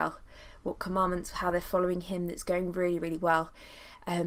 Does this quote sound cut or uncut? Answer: uncut